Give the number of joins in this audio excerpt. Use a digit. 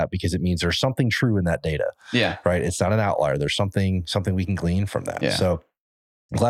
0